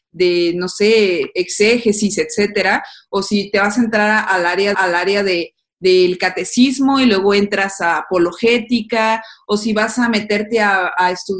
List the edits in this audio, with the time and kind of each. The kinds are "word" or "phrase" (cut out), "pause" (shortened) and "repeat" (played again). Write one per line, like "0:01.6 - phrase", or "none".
0:04.7 - repeat